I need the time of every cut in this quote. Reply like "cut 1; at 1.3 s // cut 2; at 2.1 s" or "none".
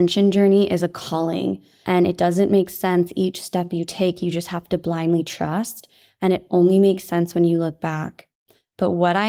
none